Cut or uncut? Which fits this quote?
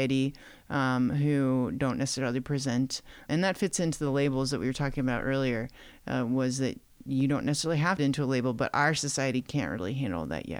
cut